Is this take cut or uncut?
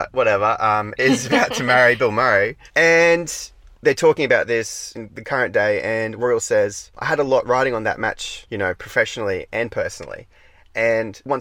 uncut